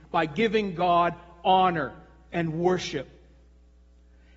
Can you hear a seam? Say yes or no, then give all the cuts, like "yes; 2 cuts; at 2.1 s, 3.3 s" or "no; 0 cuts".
no; 0 cuts